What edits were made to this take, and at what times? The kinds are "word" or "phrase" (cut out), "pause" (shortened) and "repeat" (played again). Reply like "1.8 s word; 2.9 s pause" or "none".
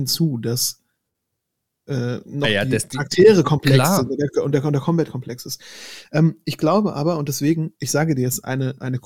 none